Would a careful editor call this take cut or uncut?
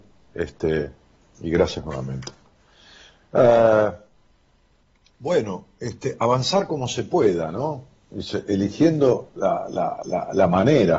uncut